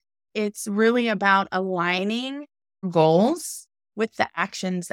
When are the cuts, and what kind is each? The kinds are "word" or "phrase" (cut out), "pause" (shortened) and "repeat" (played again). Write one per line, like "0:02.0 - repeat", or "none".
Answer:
0:02.8 - word